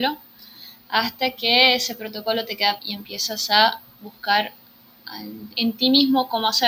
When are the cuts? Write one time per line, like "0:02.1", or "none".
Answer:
0:02.8